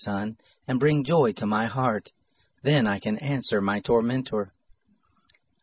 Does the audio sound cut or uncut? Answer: uncut